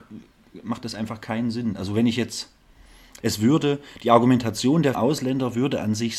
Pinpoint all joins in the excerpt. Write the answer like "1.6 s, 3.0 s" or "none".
3.2 s, 4.9 s